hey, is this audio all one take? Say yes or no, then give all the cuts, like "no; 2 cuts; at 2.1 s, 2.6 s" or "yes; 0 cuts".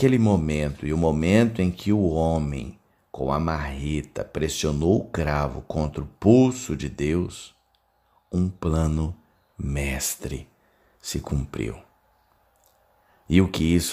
yes; 0 cuts